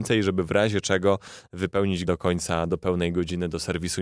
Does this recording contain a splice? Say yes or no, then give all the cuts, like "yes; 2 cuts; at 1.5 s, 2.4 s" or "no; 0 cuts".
yes; 2 cuts; at 2.1 s, 2.7 s